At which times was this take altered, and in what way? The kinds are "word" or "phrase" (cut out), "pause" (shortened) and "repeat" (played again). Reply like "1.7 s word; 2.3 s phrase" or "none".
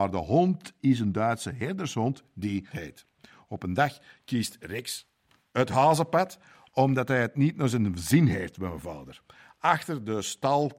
2.7 s word